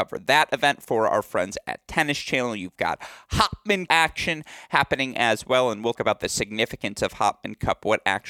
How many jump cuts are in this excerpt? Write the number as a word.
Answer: two